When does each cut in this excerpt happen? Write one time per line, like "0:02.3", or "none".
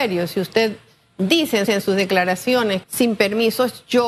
0:01.7
0:02.8